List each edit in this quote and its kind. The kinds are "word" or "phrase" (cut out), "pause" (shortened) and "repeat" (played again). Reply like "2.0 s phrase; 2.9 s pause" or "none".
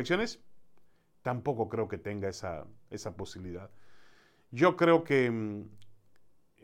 none